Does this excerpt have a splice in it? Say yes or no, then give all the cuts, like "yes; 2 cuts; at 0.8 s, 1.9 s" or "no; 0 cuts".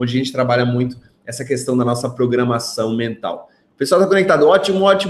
no; 0 cuts